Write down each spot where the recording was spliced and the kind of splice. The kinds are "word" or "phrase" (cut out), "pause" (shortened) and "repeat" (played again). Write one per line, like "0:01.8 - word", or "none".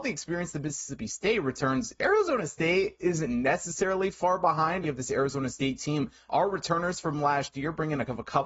0:04.8 - phrase
0:06.3 - word